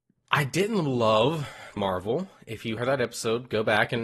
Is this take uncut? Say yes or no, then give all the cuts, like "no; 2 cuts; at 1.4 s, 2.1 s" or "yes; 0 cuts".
no; 2 cuts; at 1.8 s, 2.8 s